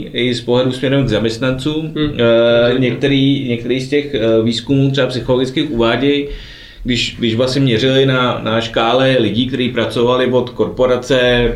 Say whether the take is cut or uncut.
uncut